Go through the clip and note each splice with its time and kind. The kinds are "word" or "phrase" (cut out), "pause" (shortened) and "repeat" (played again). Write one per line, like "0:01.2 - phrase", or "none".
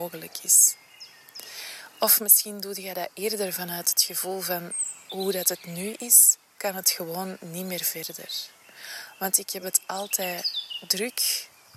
none